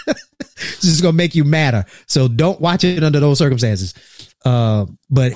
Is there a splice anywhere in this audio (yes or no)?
no